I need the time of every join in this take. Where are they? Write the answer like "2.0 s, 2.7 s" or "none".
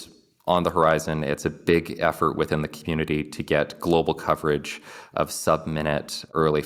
none